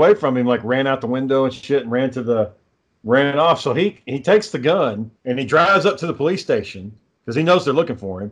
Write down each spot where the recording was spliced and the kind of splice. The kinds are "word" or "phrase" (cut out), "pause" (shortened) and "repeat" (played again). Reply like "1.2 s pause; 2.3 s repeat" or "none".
5.2 s pause